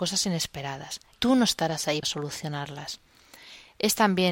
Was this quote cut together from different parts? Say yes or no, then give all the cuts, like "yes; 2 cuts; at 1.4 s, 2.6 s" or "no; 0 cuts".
yes; 2 cuts; at 1.1 s, 2.0 s